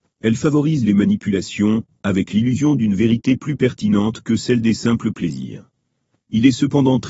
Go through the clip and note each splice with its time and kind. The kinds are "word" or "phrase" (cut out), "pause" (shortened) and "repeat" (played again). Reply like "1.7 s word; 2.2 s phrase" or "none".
none